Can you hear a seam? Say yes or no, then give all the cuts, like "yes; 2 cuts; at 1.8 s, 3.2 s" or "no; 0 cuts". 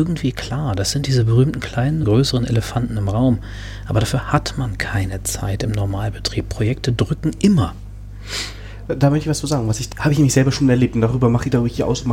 yes; 2 cuts; at 2.0 s, 9.9 s